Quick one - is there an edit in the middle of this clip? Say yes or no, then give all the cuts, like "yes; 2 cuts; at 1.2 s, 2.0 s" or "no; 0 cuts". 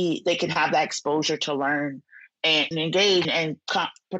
yes; 2 cuts; at 2.7 s, 3.2 s